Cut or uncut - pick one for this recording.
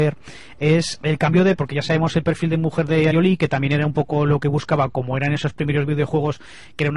cut